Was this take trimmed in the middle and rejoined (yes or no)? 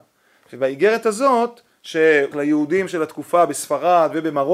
yes